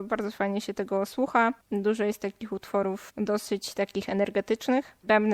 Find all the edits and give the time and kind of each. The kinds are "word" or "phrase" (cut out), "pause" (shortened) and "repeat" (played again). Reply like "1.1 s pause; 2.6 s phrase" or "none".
1.6 s pause